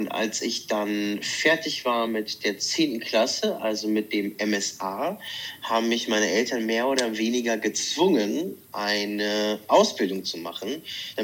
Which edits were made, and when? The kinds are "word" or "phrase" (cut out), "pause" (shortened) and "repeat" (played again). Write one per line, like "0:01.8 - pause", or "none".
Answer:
none